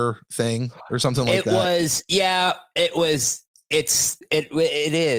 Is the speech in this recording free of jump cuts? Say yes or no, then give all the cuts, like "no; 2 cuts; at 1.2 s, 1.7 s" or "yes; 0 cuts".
yes; 0 cuts